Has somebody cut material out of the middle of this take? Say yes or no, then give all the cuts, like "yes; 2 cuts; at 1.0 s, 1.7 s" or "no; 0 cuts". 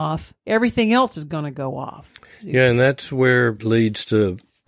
yes; 1 cut; at 3.6 s